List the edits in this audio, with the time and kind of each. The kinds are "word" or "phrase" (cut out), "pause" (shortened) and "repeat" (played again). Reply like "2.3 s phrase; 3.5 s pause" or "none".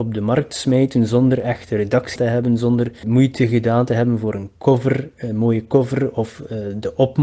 2.2 s word